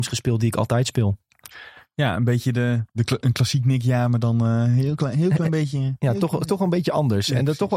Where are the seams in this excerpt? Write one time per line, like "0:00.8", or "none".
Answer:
none

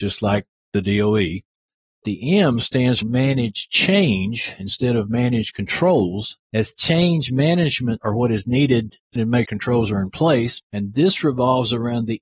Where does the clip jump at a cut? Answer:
0:02.0
0:03.0
0:06.4
0:08.0
0:09.2
0:09.5
0:10.7

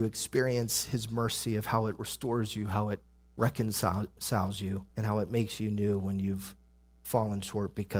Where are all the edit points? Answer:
0:04.9

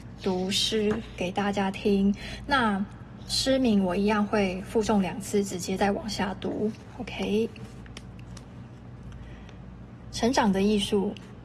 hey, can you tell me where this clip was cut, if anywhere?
0:03.3

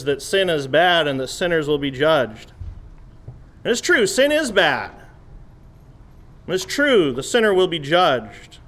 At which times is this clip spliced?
none

